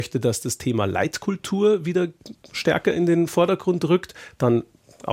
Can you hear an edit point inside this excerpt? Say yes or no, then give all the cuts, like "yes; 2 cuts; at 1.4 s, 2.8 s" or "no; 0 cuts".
no; 0 cuts